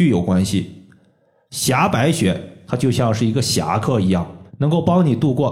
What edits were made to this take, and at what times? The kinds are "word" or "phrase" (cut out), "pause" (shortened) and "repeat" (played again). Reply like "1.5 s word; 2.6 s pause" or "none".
4.5 s pause